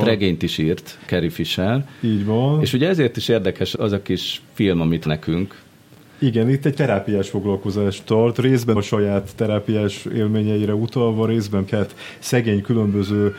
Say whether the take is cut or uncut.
cut